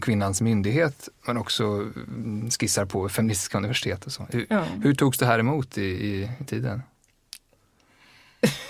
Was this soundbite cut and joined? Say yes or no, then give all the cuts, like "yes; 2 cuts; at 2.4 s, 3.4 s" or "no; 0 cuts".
no; 0 cuts